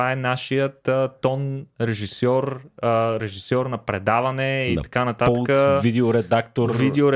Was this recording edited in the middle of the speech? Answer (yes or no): no